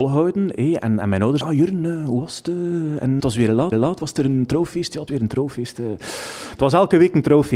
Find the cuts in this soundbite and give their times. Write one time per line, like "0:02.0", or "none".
0:01.4
0:03.2
0:03.7
0:05.1